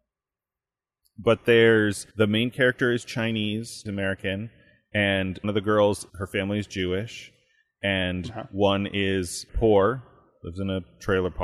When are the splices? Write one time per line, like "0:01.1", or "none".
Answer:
0:02.1
0:03.9
0:05.4
0:06.1
0:09.5